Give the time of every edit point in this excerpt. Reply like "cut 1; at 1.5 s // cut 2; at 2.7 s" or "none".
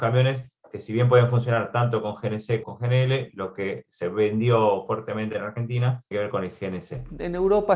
cut 1; at 2.6 s // cut 2; at 6.1 s